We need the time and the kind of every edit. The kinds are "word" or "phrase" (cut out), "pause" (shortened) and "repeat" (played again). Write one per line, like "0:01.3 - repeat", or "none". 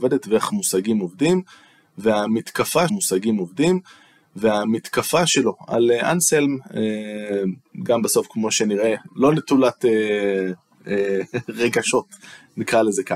0:02.9 - repeat
0:09.1 - word